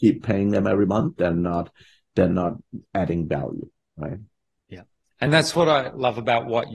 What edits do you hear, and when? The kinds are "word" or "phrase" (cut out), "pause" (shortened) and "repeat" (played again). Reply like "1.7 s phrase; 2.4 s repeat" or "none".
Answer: 1.2 s word; 5.3 s word